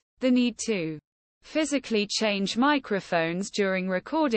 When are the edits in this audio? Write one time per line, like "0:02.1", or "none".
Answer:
none